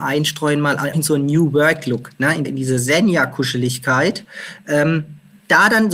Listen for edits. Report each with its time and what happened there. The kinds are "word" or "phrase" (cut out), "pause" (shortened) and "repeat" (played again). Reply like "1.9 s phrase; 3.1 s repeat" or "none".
0.9 s word; 2.4 s word

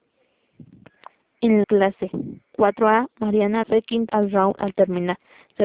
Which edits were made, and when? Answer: 1.6 s word; 3.6 s word; 4.1 s word

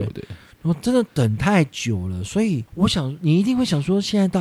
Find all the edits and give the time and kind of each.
2.7 s pause

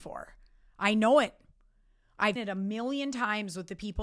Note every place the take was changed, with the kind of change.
2.4 s word

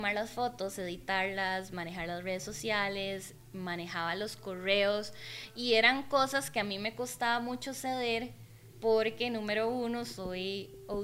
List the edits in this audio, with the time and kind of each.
none

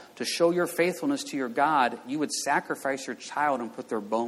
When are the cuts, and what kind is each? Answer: none

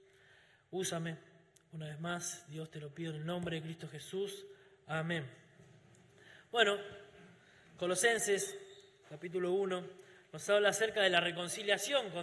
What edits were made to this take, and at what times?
none

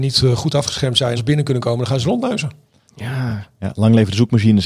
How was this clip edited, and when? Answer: 1.2 s word

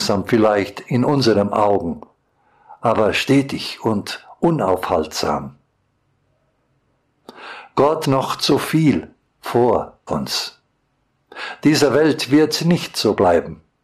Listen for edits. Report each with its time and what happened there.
8.0 s word; 10.1 s word

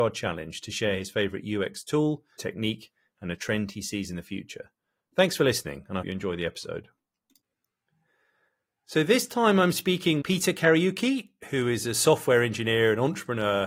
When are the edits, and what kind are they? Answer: 2.4 s word; 6.0 s word; 10.2 s word

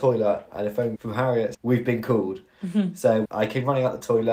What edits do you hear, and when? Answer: 1.0 s word; 1.5 s word; 3.2 s word

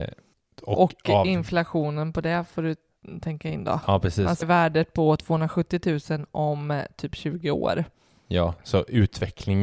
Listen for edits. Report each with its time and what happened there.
4.4 s word

